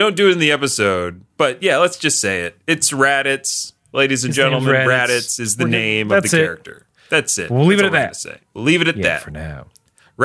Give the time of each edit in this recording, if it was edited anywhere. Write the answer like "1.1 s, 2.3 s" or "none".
1.3 s, 8.5 s